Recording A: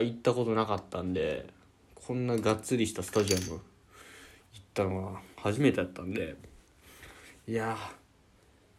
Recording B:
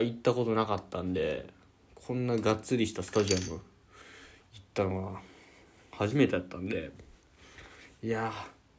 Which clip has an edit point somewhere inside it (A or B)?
A